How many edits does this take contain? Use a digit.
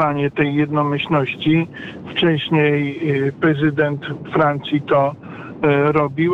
0